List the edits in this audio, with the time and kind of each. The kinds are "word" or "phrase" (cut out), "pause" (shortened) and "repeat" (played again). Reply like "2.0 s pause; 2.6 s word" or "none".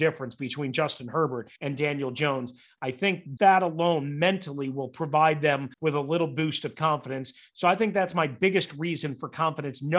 1.6 s pause; 3.4 s word; 5.7 s pause